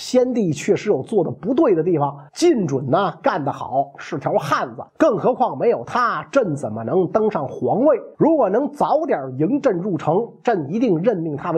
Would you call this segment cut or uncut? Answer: cut